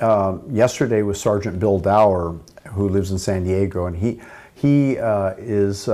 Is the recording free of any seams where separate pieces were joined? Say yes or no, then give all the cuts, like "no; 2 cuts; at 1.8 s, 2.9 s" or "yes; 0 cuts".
yes; 0 cuts